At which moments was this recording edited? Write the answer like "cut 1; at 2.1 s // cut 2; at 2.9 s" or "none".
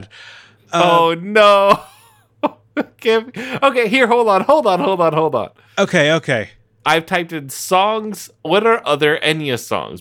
none